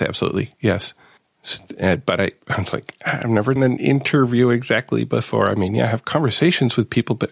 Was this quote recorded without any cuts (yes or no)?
no